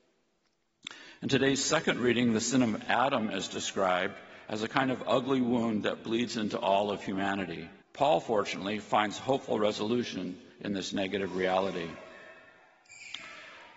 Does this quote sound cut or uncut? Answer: cut